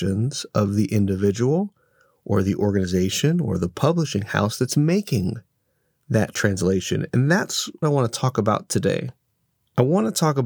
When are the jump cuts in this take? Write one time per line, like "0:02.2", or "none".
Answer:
0:07.8